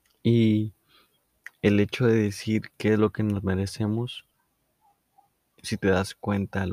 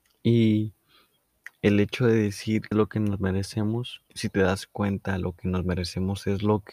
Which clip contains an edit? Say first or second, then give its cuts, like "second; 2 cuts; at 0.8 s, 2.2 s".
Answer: second; 2 cuts; at 2.7 s, 4.1 s